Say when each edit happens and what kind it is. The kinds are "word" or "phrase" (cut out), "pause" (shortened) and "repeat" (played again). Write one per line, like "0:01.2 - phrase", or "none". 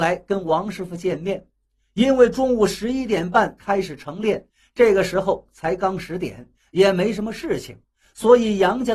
none